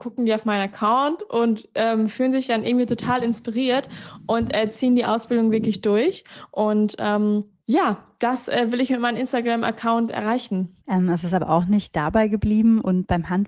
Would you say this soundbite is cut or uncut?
cut